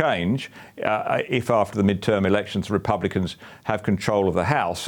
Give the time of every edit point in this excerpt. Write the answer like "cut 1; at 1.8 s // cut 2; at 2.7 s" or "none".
none